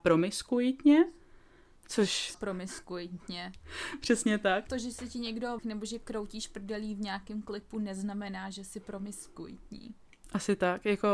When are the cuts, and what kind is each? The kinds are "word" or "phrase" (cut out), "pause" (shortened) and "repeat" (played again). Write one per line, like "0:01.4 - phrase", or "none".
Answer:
0:02.3 - word
0:05.6 - phrase